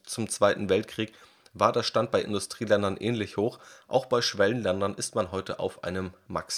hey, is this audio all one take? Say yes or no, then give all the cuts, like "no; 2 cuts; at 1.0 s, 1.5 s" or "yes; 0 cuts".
yes; 0 cuts